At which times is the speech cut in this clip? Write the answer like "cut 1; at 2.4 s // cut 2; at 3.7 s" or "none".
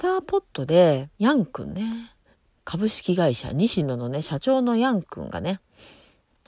cut 1; at 1.1 s // cut 2; at 2.3 s